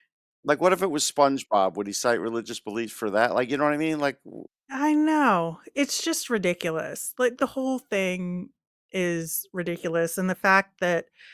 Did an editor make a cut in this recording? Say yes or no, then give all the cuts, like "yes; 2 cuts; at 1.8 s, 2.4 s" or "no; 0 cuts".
no; 0 cuts